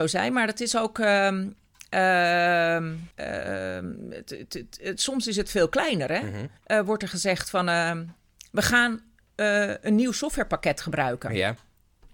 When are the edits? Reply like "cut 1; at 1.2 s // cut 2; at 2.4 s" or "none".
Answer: cut 1; at 3.1 s // cut 2; at 6.6 s